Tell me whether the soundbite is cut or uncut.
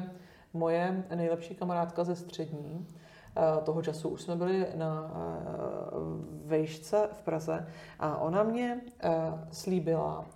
uncut